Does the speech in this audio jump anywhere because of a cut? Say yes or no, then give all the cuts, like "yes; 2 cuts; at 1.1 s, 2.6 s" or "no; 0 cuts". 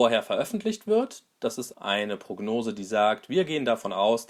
yes; 1 cut; at 1.7 s